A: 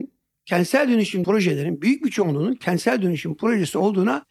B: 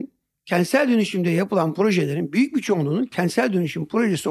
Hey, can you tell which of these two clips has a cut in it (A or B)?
A